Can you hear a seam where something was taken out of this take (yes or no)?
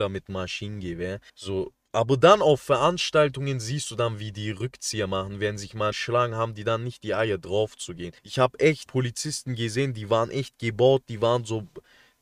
yes